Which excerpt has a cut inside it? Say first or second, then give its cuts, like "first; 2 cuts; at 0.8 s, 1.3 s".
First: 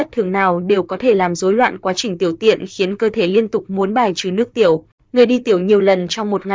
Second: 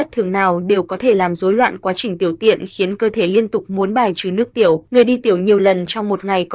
second; 1 cut; at 4.9 s